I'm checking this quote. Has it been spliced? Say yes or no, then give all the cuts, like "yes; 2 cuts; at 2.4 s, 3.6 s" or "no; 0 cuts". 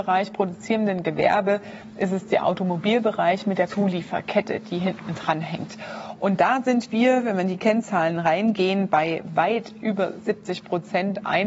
yes; 1 cut; at 3.7 s